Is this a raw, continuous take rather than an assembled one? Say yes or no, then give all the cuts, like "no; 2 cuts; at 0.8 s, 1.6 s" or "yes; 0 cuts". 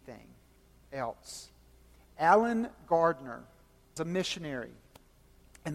no; 1 cut; at 4.0 s